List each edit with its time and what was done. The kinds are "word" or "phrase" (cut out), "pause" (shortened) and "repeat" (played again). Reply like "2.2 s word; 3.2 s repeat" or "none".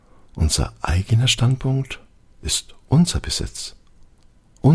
none